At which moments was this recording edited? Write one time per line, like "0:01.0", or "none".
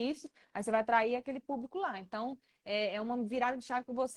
none